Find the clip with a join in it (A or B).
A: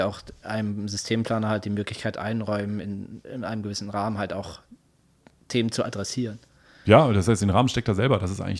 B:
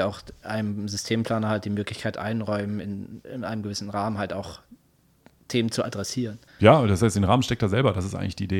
B